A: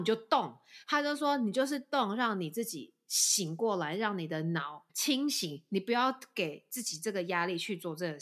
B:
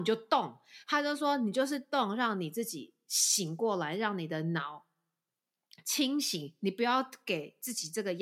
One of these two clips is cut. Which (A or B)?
A